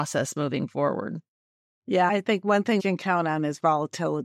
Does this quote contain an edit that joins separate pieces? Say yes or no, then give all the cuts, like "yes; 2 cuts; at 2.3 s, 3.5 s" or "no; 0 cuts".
yes; 2 cuts; at 2.1 s, 2.8 s